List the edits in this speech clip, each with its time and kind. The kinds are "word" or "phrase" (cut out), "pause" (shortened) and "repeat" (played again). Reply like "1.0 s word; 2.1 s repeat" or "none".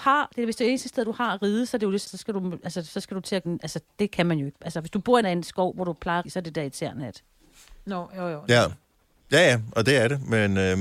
2.0 s word; 3.4 s word; 5.2 s word; 6.2 s word